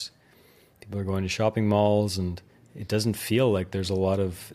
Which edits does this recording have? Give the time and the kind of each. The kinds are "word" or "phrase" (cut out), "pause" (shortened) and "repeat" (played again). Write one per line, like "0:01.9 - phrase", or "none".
0:02.5 - pause